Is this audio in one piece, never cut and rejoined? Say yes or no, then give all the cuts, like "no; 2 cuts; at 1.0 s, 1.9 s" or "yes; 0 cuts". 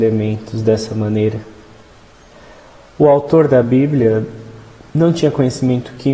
yes; 0 cuts